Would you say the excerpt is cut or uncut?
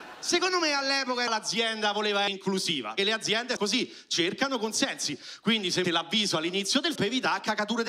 cut